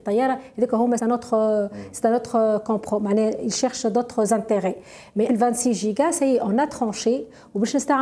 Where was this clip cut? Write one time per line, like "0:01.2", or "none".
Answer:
0:01.0
0:05.3

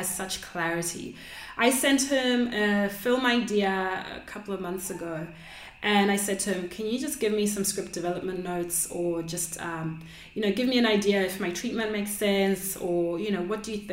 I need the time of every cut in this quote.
none

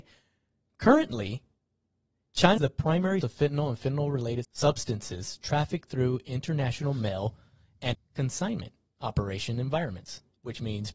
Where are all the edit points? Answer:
0:02.6
0:03.2
0:04.4
0:07.9

